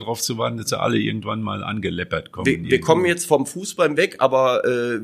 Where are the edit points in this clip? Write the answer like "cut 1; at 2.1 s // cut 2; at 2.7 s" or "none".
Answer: cut 1; at 4.0 s